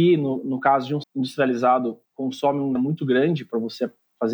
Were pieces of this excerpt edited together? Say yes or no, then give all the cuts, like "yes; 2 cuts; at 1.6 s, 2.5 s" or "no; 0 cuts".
yes; 3 cuts; at 1.0 s, 2.1 s, 2.8 s